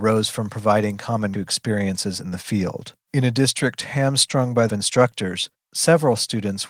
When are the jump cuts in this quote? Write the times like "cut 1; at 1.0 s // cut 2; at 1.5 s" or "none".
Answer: cut 1; at 1.3 s // cut 2; at 3.0 s // cut 3; at 4.7 s